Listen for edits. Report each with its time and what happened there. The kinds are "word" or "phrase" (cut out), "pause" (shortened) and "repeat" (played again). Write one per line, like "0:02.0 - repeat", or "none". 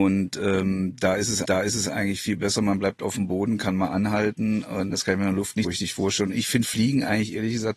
0:01.4 - repeat
0:05.6 - word